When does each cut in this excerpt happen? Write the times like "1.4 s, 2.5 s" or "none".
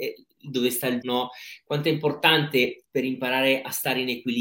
1.0 s, 2.8 s